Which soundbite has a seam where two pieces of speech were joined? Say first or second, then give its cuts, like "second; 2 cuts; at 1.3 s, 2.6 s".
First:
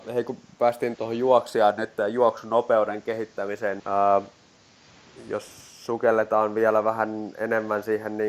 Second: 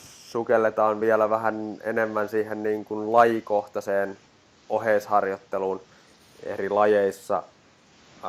first; 2 cuts; at 0.9 s, 3.8 s